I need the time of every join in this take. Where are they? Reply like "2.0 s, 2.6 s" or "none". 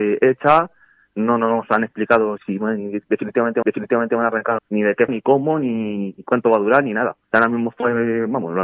2.4 s, 3.6 s, 4.6 s, 5.1 s, 7.2 s